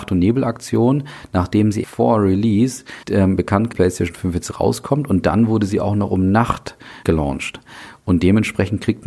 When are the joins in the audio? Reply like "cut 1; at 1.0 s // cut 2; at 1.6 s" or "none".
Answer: cut 1; at 1.8 s // cut 2; at 3.0 s // cut 3; at 3.7 s // cut 4; at 7.0 s